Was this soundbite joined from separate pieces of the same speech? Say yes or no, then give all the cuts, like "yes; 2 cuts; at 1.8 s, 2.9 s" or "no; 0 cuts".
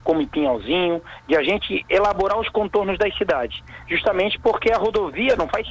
no; 0 cuts